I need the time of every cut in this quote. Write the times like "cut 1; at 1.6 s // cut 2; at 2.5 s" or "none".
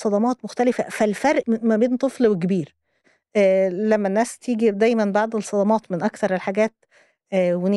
cut 1; at 1.4 s